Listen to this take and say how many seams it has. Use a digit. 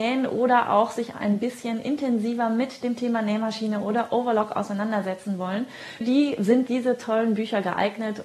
3